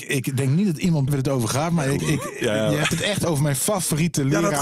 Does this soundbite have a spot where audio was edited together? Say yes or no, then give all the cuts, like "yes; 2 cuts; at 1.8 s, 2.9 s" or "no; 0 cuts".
yes; 2 cuts; at 1.1 s, 2.0 s